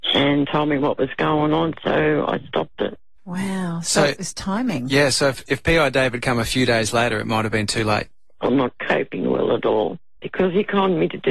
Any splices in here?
no; 0 cuts

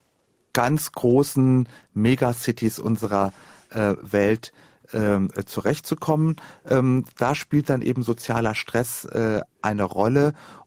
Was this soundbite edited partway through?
no; 0 cuts

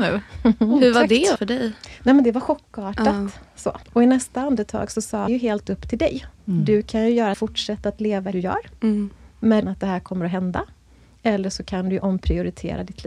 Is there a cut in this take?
yes; 8 cuts; at 1.4 s, 3.8 s, 5.3 s, 5.6 s, 6.4 s, 7.3 s, 8.3 s, 9.6 s

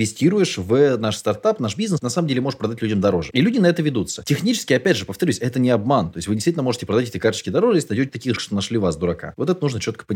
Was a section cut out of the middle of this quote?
yes; 2 cuts; at 2.0 s, 8.4 s

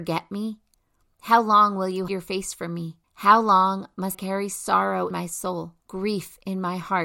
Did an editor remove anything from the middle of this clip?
yes; 5 cuts; at 2.1 s, 3.0 s, 4.1 s, 5.1 s, 5.8 s

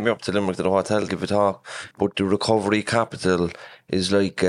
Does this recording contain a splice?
yes; 2 cuts; at 1.1 s, 1.9 s

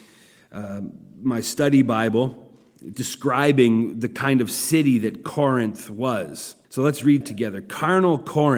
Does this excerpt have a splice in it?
yes; 3 cuts; at 2.9 s, 6.6 s, 7.2 s

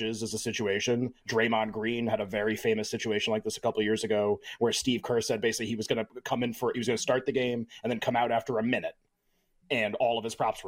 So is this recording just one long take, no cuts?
yes; 0 cuts

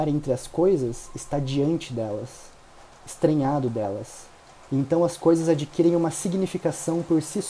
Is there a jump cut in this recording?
no; 0 cuts

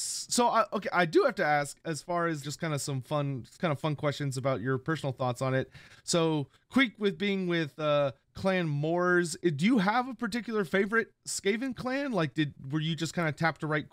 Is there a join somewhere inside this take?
yes; 3 cuts; at 2.4 s, 3.5 s, 8.2 s

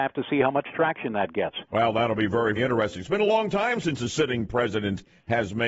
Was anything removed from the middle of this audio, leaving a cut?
yes; 2 cuts; at 1.7 s, 2.6 s

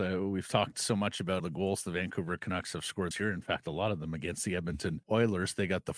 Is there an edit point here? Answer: yes; 3 cuts; at 1.4 s, 3.1 s, 5.0 s

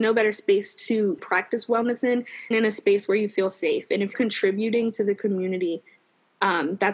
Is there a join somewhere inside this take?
yes; 3 cuts; at 1.2 s, 2.5 s, 4.1 s

